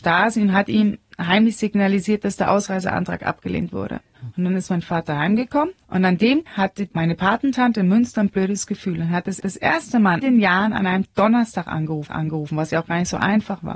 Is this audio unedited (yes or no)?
no